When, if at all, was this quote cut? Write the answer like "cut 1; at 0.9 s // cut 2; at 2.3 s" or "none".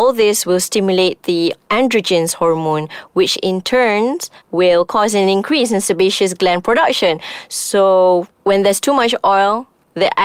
none